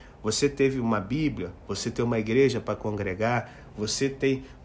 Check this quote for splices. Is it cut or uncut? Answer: uncut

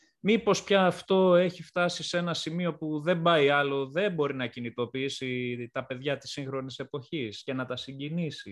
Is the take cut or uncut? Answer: uncut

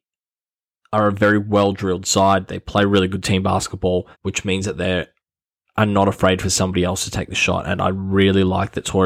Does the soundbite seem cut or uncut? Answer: cut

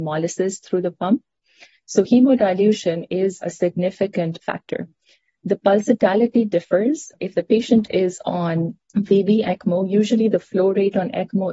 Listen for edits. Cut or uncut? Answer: uncut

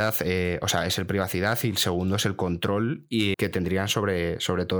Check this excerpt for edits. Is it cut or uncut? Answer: cut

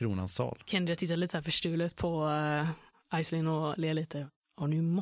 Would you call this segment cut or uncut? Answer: uncut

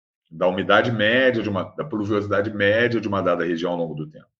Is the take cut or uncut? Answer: uncut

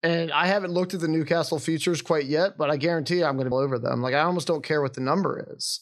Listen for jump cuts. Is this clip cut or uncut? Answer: cut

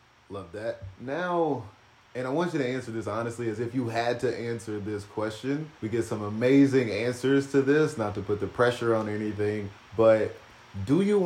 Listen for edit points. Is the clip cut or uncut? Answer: cut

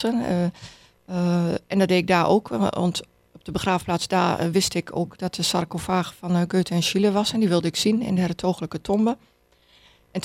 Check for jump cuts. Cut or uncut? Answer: uncut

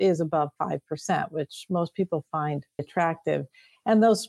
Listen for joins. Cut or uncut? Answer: cut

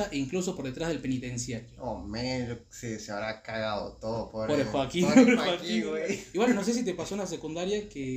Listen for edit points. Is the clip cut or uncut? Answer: uncut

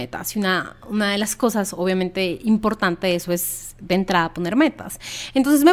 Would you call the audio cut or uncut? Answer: uncut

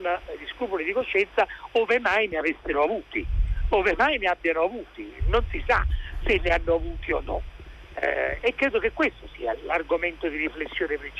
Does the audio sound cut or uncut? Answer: uncut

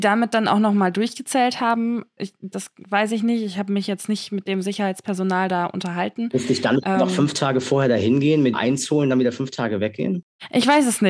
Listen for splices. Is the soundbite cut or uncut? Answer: cut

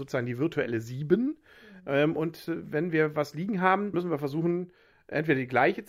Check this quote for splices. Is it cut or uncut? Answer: cut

